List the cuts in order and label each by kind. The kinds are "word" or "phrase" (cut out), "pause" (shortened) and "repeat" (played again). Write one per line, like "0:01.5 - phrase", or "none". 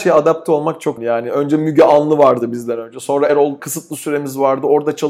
0:01.0 - word
0:03.3 - word
0:03.6 - word